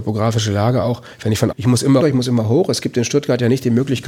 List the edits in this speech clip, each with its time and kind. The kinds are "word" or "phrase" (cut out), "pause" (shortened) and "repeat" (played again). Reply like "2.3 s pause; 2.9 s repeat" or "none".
1.5 s phrase; 2.0 s word